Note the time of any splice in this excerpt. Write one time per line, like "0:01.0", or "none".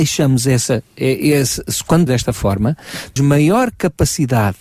0:02.1
0:03.2